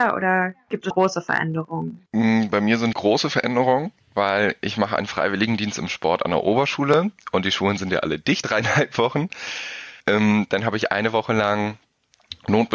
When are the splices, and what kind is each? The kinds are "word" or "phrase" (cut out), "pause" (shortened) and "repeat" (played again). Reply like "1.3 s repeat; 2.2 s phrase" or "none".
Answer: 0.9 s word; 2.1 s pause; 2.9 s word; 8.4 s word; 10.0 s pause

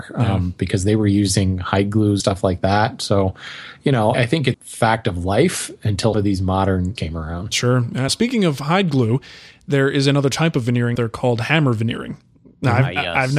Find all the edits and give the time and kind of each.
2.2 s word; 4.1 s word; 4.5 s word; 6.1 s word; 7.0 s word; 8.1 s word; 11.0 s word

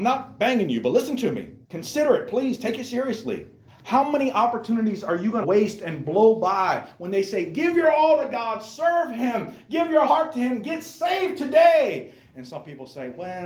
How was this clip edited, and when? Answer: 1.6 s pause; 3.7 s pause; 5.4 s word; 10.1 s word

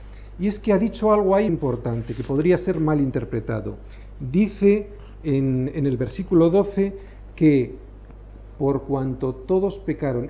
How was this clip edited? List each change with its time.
1.5 s word

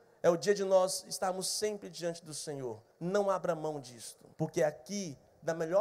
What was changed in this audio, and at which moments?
2.9 s pause; 4.3 s pause

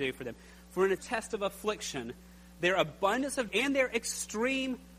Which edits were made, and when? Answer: 1.0 s word; 3.5 s word

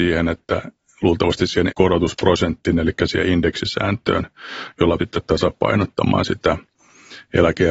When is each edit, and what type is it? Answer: 1.7 s word; 5.0 s word

